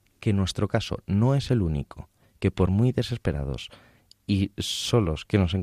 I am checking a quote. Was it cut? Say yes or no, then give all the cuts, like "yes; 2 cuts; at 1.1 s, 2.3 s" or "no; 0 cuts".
no; 0 cuts